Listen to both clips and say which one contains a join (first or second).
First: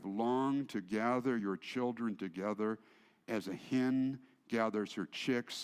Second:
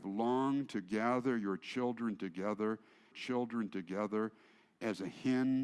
second